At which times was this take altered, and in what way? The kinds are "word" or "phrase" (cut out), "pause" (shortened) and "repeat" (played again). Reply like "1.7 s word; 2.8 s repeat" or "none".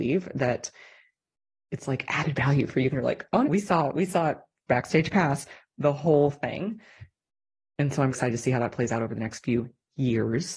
2.9 s word; 3.4 s word; 8.1 s word